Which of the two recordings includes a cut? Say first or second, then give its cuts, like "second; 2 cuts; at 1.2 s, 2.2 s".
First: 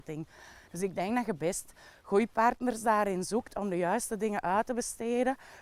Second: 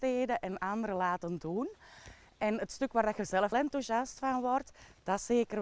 second; 1 cut; at 3.5 s